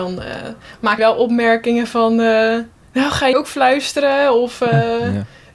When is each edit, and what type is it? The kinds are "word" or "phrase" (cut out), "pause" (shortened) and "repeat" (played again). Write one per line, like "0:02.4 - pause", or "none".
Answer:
0:01.0 - word
0:02.8 - pause
0:03.3 - word